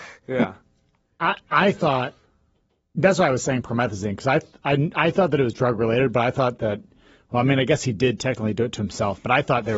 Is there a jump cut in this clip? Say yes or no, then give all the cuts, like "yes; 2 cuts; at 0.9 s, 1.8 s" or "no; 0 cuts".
no; 0 cuts